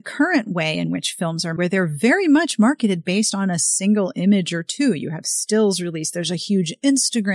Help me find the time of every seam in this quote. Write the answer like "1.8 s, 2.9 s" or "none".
1.6 s